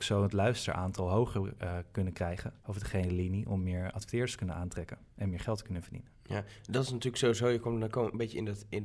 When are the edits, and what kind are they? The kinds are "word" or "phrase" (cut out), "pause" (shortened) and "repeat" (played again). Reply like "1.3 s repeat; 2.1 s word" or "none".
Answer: 2.6 s pause